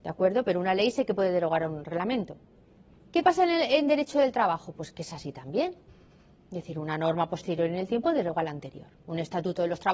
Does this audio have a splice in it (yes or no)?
no